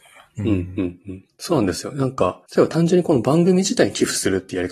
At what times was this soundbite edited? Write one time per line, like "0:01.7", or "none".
0:02.5